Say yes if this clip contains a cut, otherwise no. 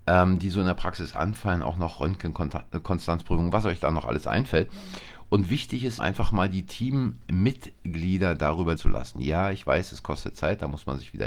yes